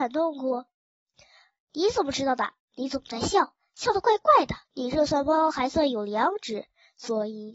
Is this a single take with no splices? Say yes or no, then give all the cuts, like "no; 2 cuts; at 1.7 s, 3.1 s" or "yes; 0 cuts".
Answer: no; 1 cut; at 4.6 s